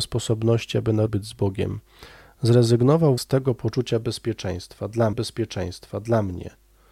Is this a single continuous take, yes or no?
no